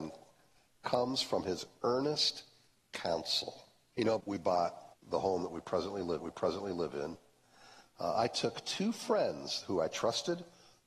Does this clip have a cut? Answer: yes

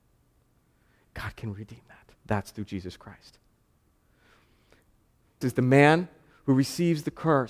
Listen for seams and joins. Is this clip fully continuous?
no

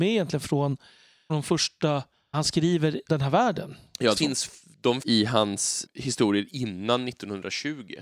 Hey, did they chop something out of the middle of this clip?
yes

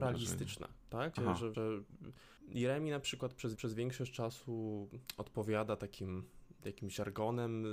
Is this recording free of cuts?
no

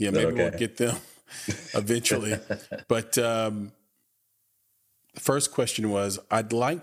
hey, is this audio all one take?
yes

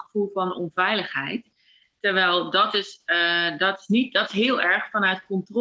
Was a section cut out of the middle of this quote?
no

